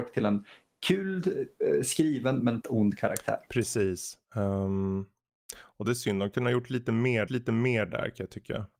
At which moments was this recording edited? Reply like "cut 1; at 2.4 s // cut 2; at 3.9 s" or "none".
cut 1; at 2.6 s // cut 2; at 4.2 s // cut 3; at 7.3 s